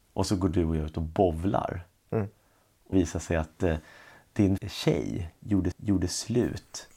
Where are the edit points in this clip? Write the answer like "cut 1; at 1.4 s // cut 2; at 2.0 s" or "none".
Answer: cut 1; at 2.9 s // cut 2; at 4.6 s // cut 3; at 5.7 s